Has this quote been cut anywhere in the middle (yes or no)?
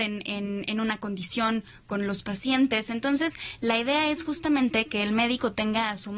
no